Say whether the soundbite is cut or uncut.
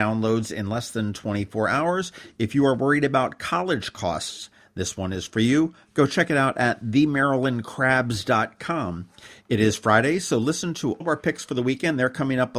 cut